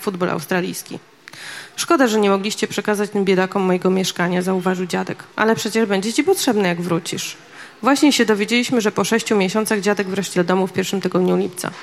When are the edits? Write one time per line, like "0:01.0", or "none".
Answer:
0:05.3
0:10.3